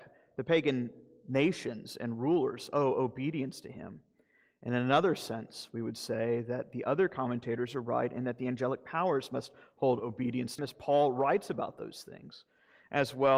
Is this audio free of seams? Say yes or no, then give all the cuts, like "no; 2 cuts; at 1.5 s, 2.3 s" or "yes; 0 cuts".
no; 1 cut; at 10.6 s